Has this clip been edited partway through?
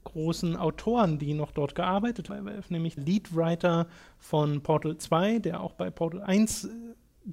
yes; 2 cuts; at 2.3 s, 3.0 s

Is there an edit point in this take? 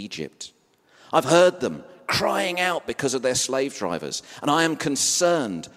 no; 0 cuts

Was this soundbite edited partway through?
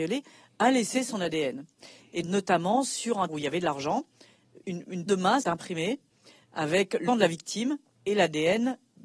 yes; 6 cuts; at 2.2 s, 3.3 s, 4.6 s, 5.1 s, 5.4 s, 7.1 s

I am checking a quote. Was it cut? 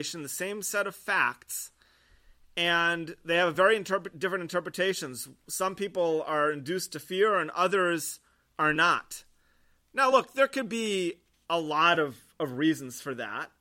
no; 0 cuts

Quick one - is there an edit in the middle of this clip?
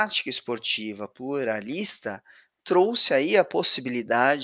no; 0 cuts

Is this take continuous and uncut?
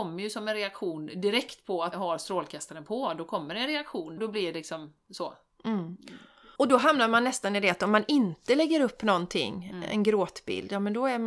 no; 3 cuts; at 1.9 s, 4.2 s, 6.6 s

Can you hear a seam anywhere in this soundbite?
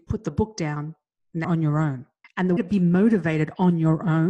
yes; 3 cuts; at 1.4 s, 2.2 s, 2.6 s

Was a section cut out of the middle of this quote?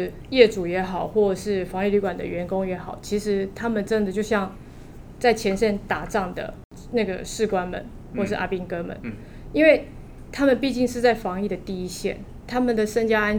no; 0 cuts

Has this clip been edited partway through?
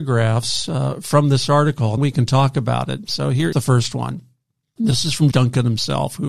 yes; 3 cuts; at 2.0 s, 3.5 s, 5.3 s

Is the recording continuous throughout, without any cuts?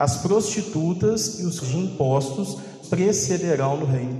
no; 2 cuts; at 1.6 s, 2.8 s

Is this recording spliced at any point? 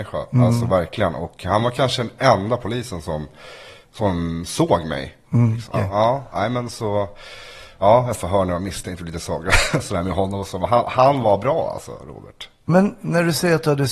yes; 2 cuts; at 5.7 s, 8.1 s

